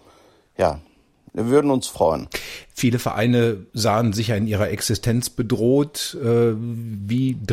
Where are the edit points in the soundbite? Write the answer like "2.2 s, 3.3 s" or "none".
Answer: 3.7 s